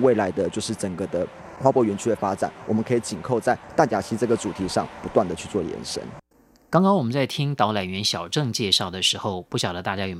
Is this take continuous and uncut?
yes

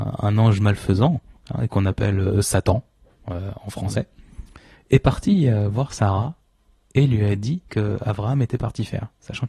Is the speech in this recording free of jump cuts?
no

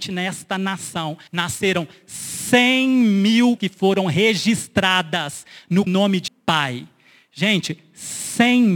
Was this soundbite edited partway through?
yes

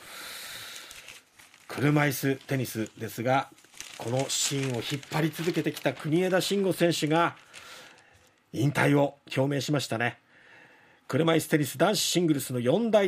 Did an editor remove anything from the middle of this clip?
no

